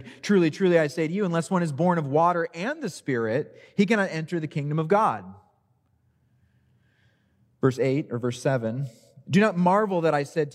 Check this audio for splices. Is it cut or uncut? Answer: uncut